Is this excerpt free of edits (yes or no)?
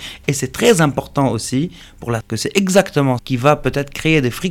no